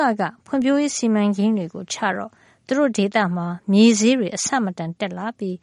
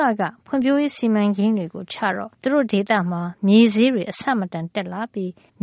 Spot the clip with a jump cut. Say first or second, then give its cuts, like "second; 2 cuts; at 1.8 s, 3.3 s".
second; 1 cut; at 2.3 s